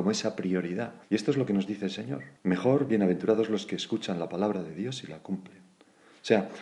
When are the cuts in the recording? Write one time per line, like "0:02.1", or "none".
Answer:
0:01.0
0:02.4